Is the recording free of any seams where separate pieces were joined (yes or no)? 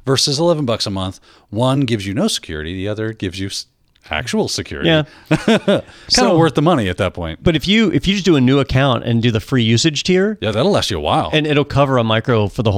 yes